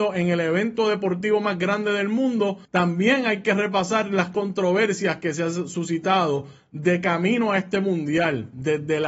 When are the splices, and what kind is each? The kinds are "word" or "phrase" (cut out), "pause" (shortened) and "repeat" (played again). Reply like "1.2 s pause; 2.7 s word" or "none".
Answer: 2.7 s pause